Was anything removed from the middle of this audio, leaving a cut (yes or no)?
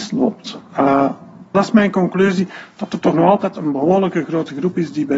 yes